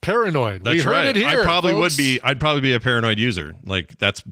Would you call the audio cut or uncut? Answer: uncut